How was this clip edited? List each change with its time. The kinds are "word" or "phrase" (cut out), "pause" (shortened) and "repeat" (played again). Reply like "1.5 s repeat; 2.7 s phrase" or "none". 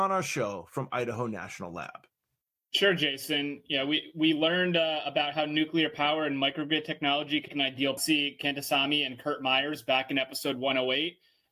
7.5 s word; 8.0 s phrase